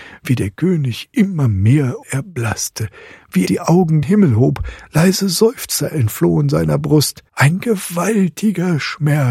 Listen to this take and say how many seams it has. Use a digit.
4